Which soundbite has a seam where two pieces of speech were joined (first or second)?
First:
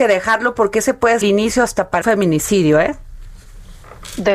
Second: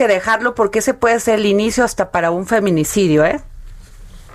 first